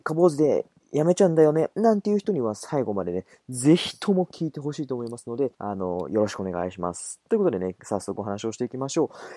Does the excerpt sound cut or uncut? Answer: cut